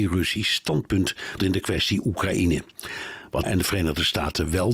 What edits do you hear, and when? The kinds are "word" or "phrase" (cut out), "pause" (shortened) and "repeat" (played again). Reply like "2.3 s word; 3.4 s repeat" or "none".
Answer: 1.4 s word; 3.4 s word